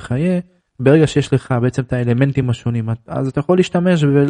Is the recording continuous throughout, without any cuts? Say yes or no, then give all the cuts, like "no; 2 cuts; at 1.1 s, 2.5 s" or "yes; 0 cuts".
yes; 0 cuts